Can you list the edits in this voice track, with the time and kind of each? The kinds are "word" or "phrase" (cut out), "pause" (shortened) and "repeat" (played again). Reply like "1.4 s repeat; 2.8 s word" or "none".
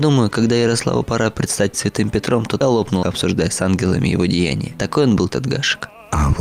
1.0 s word; 1.7 s word; 2.6 s word; 3.0 s phrase; 5.3 s word